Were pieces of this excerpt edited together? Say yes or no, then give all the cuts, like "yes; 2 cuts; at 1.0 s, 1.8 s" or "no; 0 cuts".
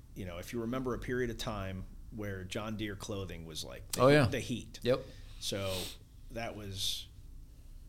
no; 0 cuts